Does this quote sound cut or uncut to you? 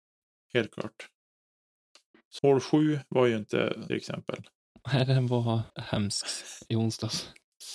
cut